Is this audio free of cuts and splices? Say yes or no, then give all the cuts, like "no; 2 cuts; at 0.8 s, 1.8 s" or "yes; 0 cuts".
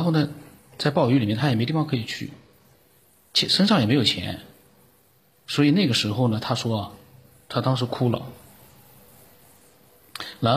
yes; 0 cuts